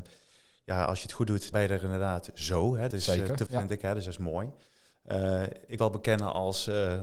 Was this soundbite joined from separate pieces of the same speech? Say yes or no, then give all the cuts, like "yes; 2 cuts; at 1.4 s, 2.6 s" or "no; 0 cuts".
yes; 4 cuts; at 1.5 s, 2.9 s, 3.5 s, 5.8 s